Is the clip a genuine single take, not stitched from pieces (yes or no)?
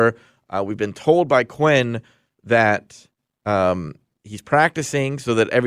yes